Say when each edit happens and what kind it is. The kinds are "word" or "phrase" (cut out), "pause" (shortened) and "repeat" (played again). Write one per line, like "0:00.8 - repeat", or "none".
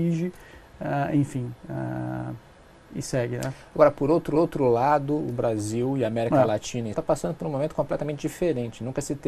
0:04.3 - repeat
0:06.9 - word